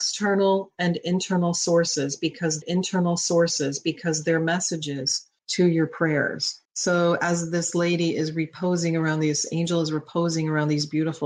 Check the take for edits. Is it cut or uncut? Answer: cut